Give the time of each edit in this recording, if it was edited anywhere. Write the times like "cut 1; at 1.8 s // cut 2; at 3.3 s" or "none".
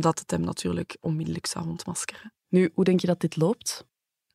cut 1; at 2.4 s